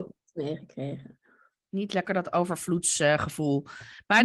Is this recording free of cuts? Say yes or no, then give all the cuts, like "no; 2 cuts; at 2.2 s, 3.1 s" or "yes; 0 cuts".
yes; 0 cuts